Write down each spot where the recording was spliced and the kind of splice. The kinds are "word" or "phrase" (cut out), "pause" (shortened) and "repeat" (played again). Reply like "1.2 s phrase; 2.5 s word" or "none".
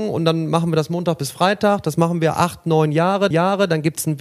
3.3 s repeat